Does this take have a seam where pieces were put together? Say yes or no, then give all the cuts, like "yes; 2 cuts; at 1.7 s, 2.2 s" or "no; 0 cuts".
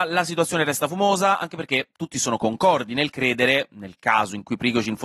no; 0 cuts